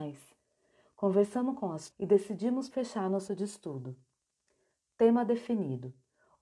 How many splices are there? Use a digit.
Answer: 3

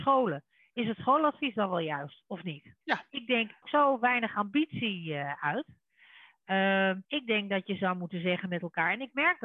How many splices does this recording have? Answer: 3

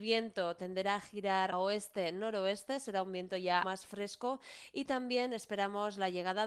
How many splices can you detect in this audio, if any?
2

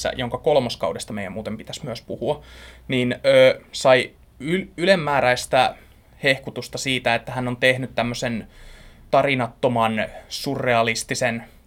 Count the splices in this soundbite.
0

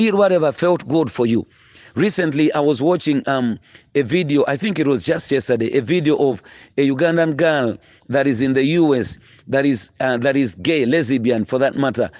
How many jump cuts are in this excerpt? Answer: 0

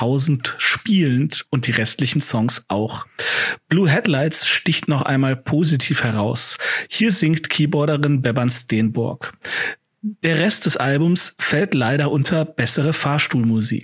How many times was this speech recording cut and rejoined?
0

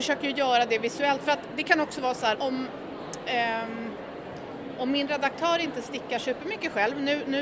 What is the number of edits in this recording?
1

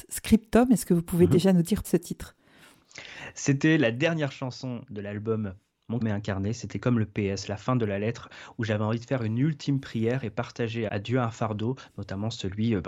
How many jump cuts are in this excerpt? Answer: 3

